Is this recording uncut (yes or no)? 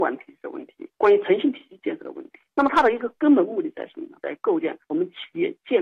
yes